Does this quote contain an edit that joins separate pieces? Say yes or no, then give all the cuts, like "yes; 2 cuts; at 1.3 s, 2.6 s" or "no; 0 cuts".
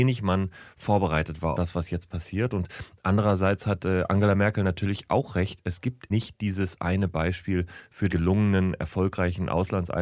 yes; 3 cuts; at 1.5 s, 6.1 s, 8.1 s